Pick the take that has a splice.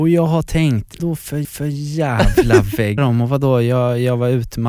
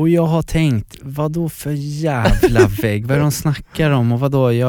first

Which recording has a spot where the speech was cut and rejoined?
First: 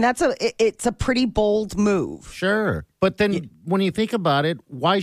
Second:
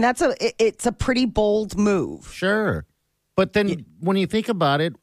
first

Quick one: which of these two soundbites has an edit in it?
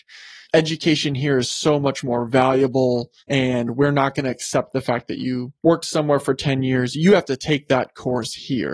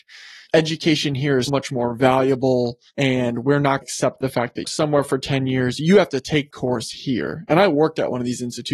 second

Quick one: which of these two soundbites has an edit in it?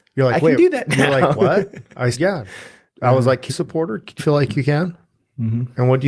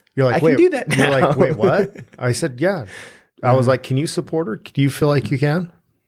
first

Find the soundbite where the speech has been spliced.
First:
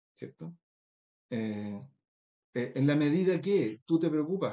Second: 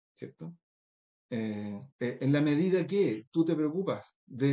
second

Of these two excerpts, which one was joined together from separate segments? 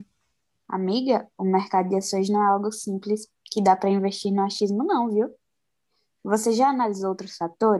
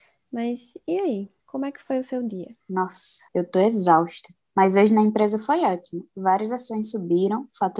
second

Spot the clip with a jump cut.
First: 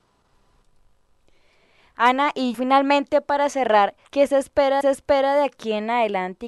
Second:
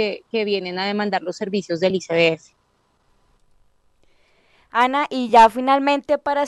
first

